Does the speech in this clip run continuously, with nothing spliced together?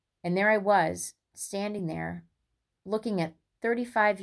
yes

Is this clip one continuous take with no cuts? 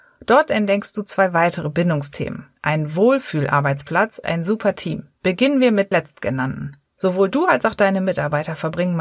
no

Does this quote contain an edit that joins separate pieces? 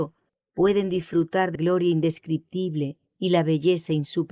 yes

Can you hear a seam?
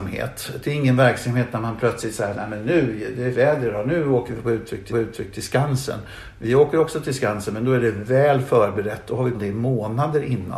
yes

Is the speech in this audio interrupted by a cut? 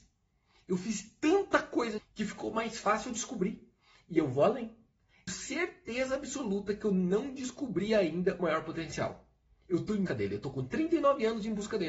yes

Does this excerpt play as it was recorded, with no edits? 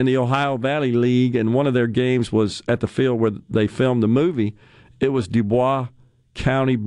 yes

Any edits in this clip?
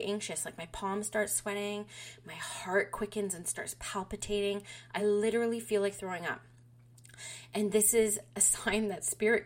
no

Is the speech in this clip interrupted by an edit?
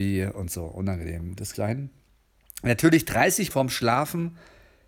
yes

